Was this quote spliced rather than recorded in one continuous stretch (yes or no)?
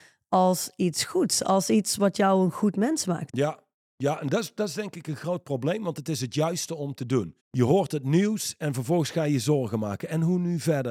yes